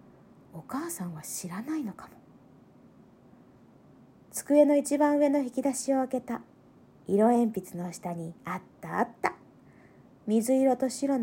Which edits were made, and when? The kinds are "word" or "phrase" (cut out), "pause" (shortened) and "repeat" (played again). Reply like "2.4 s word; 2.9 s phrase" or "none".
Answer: 6.8 s pause; 8.4 s pause